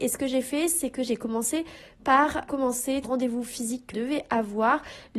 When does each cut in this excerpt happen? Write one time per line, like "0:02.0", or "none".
0:02.5
0:03.0
0:03.9

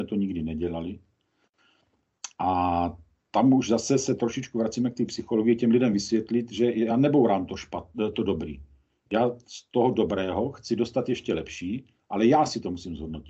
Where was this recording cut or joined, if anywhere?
none

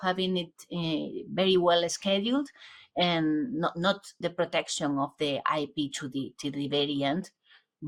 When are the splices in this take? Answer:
0:04.2

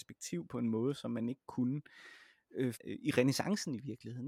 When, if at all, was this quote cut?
0:02.8

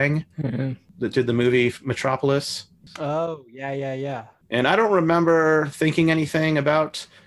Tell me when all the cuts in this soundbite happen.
none

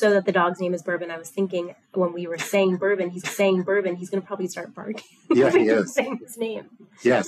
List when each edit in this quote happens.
0:03.2

